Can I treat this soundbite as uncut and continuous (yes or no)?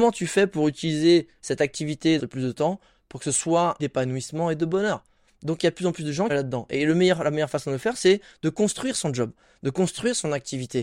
no